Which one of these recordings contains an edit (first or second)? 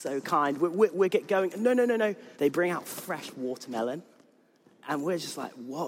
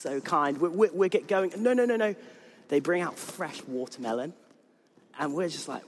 first